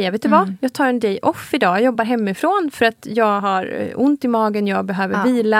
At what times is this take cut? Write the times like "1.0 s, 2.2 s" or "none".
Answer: none